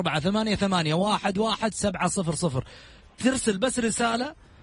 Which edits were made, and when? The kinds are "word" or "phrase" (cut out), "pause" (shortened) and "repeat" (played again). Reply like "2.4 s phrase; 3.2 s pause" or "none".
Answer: none